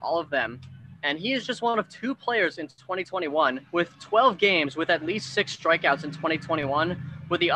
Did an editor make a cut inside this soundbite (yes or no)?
yes